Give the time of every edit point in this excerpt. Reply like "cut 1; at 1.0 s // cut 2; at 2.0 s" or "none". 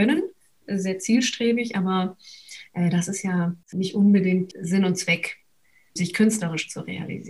cut 1; at 6.0 s